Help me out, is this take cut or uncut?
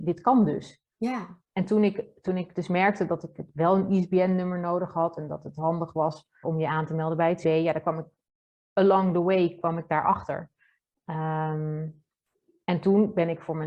cut